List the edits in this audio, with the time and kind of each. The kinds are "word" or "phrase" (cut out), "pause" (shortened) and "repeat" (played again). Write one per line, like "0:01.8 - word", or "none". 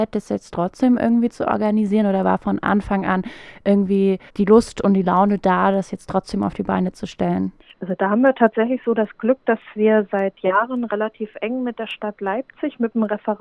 0:04.3 - pause
0:07.6 - pause